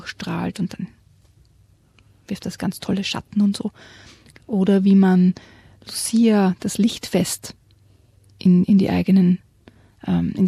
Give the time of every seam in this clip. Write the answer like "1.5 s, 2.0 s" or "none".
none